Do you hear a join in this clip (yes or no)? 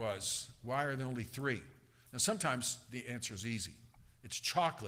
no